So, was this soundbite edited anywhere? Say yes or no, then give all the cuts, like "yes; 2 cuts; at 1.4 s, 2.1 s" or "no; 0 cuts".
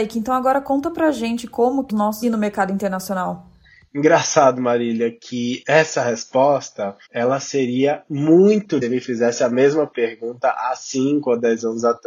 yes; 4 cuts; at 1.9 s, 2.2 s, 7.1 s, 8.8 s